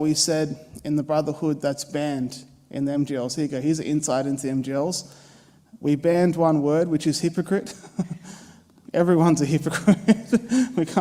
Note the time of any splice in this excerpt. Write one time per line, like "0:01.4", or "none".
none